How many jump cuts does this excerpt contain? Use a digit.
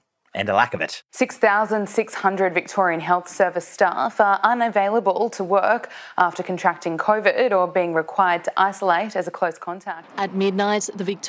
0